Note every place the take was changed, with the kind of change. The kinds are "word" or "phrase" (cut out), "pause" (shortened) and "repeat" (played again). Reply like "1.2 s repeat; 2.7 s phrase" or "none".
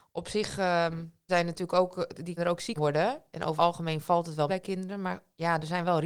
1.3 s word; 2.4 s word; 2.8 s word; 3.6 s word; 4.5 s word